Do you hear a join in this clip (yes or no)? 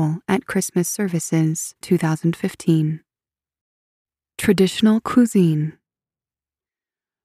yes